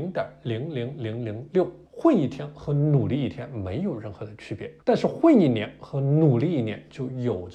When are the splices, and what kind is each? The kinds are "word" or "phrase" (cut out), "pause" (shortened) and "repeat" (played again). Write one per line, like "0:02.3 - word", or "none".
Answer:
0:01.8 - pause
0:04.8 - pause